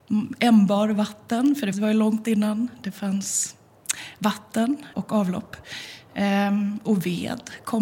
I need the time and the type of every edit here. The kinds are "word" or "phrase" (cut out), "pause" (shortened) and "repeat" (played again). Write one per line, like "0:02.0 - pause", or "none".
0:01.7 - word
0:04.9 - word